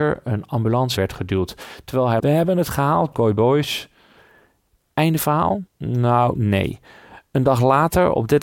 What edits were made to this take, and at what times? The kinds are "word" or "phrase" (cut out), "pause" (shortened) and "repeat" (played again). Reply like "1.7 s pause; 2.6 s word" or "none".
1.0 s word; 2.2 s phrase; 3.1 s word; 5.7 s pause